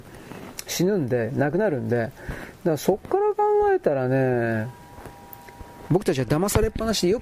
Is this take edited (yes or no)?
yes